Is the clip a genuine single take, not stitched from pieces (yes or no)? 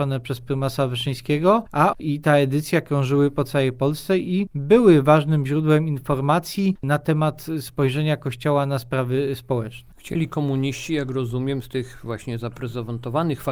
no